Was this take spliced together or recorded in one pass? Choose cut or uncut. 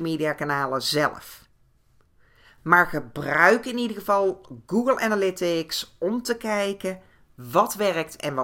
uncut